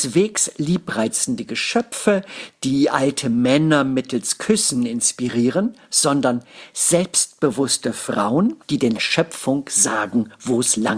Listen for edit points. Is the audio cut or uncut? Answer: cut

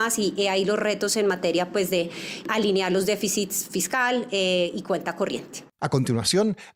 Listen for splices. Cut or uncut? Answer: cut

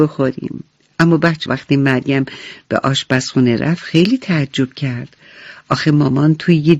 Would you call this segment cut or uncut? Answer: cut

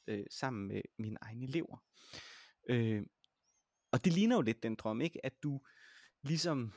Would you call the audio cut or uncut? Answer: cut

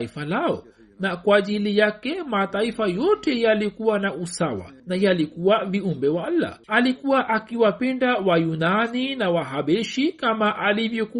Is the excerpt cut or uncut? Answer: cut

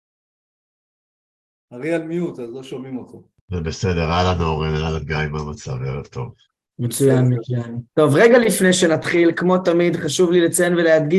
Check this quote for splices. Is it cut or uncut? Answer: cut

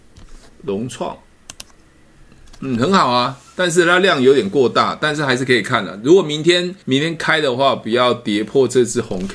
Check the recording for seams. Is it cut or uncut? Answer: cut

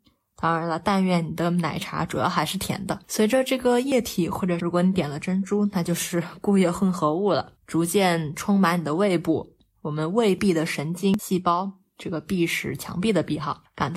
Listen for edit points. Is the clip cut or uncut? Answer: cut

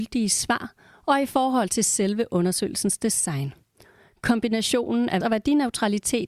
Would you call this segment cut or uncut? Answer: cut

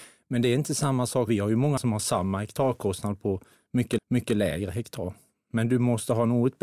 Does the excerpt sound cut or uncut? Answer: cut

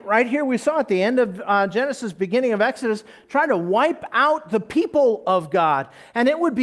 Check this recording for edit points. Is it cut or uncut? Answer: uncut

